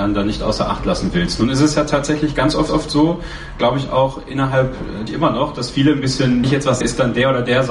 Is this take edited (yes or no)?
yes